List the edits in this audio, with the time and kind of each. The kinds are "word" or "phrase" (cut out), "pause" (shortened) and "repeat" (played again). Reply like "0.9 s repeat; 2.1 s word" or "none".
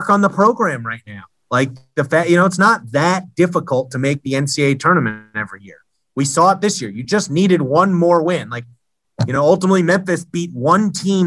none